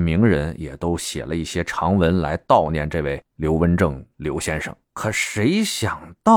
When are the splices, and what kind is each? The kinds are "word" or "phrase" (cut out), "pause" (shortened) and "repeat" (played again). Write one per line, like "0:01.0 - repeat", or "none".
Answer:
0:04.8 - pause

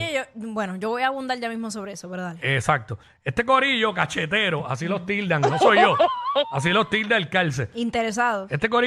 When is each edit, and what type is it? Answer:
none

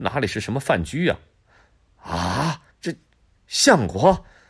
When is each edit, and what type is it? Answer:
0:02.7 - pause

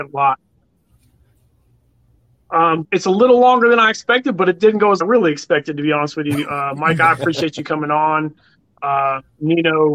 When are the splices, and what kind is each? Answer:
0:02.8 - word
0:05.0 - phrase

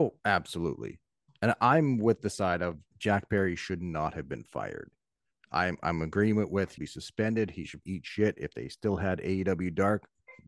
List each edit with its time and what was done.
0:02.9 - pause
0:06.8 - word
0:07.8 - word

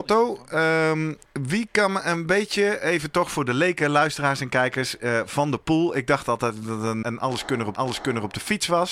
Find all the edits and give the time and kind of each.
0:01.2 - pause
0:07.0 - word
0:07.8 - repeat

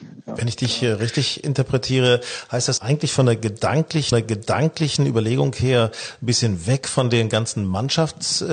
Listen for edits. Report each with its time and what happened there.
0:02.8 - word
0:04.1 - repeat

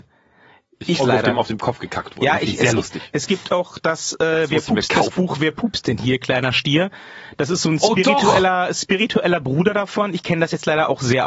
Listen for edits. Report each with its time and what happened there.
0:01.0 - phrase

